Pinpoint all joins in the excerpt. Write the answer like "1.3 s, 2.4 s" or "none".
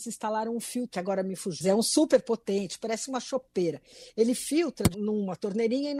0.9 s, 1.6 s, 4.9 s